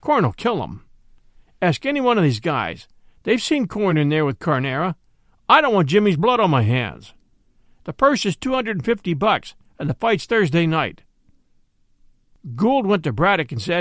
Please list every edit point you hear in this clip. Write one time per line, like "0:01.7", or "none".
none